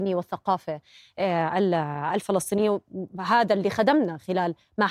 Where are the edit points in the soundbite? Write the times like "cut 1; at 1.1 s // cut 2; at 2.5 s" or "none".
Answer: none